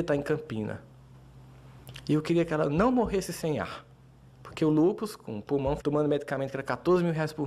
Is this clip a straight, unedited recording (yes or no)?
no